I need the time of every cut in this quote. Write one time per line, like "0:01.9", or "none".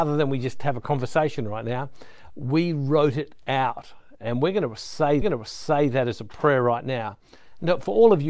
0:05.2